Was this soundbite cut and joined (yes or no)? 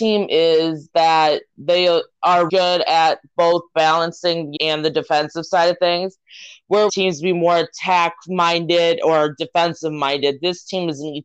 yes